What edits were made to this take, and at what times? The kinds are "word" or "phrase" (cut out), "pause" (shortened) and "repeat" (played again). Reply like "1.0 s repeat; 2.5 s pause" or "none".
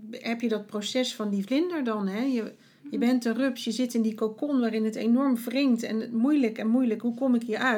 none